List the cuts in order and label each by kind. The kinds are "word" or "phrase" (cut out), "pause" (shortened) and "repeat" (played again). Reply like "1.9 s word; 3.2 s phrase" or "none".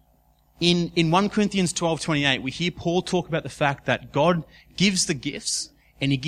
none